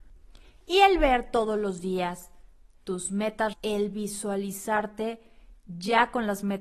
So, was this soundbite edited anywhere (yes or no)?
yes